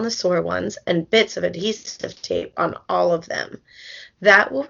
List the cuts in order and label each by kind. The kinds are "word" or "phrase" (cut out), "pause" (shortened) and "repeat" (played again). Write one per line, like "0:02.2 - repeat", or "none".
none